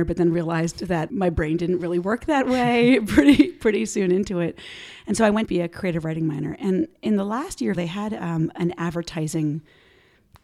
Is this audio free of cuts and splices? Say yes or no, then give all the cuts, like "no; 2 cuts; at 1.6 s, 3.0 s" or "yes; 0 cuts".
no; 3 cuts; at 1.1 s, 5.5 s, 7.7 s